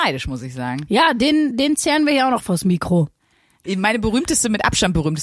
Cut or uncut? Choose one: uncut